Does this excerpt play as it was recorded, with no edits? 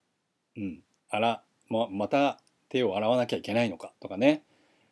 no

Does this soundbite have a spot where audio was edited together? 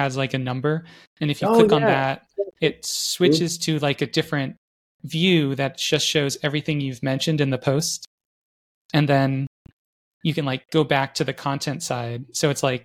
no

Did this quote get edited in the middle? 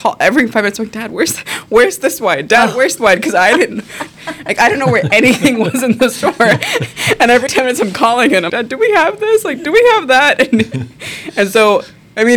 yes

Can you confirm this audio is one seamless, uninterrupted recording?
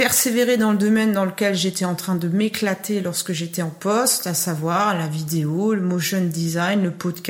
yes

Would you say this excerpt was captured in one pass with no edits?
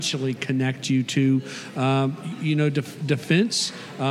yes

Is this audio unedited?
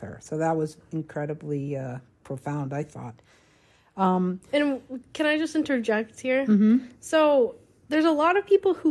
yes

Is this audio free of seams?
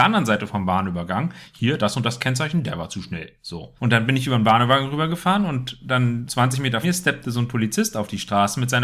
no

